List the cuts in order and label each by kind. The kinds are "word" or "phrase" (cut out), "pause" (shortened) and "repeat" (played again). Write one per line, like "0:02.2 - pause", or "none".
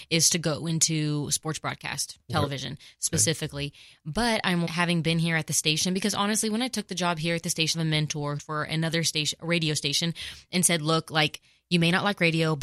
0:04.7 - word
0:07.7 - phrase
0:08.4 - phrase